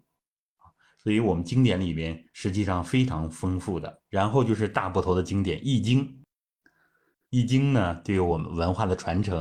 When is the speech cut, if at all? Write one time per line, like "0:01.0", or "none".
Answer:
0:04.1